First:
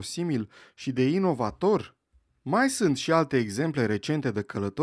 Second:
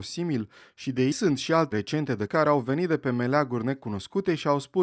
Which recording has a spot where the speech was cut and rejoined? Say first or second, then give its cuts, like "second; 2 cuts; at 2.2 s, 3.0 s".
second; 3 cuts; at 1.1 s, 1.7 s, 2.3 s